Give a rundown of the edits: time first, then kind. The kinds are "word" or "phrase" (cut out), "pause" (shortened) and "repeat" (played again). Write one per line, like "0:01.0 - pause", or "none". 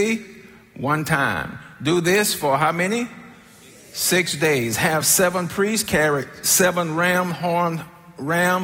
none